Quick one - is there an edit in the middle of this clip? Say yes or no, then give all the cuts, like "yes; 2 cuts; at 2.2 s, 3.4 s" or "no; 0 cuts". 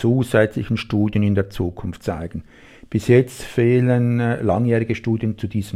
no; 0 cuts